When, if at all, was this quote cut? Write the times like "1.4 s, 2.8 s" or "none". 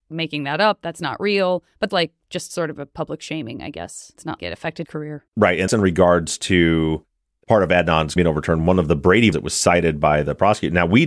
1.9 s, 4.4 s, 4.8 s, 5.7 s, 8.2 s, 9.3 s